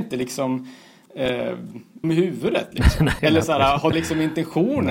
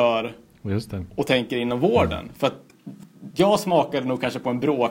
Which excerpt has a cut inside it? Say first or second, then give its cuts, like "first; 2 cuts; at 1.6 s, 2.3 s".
first; 3 cuts; at 2.0 s, 3.2 s, 3.9 s